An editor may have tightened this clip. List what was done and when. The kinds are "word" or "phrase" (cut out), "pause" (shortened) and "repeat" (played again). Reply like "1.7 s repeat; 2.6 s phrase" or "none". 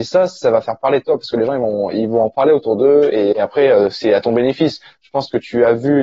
3.3 s word

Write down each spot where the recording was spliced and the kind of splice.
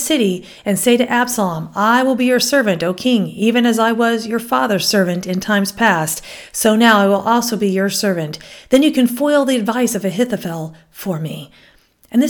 none

